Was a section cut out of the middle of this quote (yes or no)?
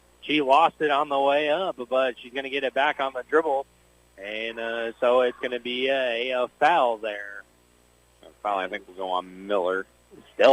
no